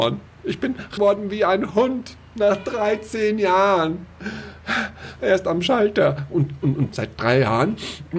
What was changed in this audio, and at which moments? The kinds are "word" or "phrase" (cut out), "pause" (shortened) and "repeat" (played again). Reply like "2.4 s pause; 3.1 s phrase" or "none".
1.0 s word; 6.9 s word